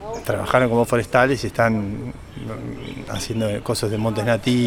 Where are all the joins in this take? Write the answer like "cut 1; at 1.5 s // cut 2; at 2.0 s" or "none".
none